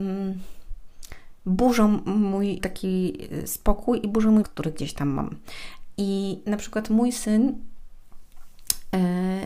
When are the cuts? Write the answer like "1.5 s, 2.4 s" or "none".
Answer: 2.6 s, 4.4 s